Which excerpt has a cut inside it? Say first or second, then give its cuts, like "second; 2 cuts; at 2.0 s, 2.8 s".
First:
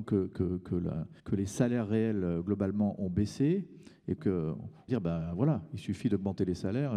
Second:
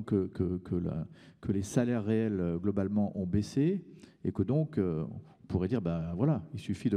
first; 3 cuts; at 1.2 s, 4.2 s, 4.9 s